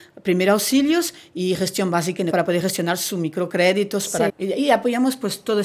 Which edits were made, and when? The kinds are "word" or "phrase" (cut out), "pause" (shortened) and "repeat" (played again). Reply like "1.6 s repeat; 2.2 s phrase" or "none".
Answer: 2.3 s word; 4.3 s word